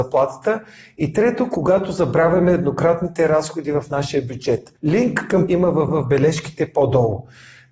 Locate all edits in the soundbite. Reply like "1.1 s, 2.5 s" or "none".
4.8 s, 5.5 s, 5.9 s